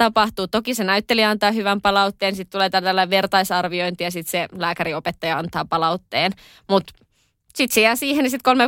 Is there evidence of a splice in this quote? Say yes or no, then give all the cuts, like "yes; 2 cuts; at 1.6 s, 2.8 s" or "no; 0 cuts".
no; 0 cuts